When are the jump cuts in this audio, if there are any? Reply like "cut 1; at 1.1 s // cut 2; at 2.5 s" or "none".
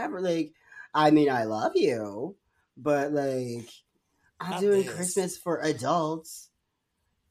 cut 1; at 4.5 s